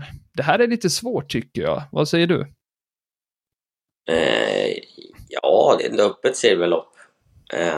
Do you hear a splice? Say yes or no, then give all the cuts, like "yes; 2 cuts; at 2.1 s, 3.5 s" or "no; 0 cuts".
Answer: yes; 1 cut; at 5.8 s